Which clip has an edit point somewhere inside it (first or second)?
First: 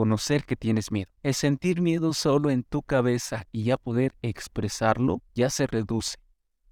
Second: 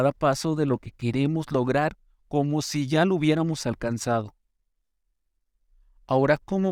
first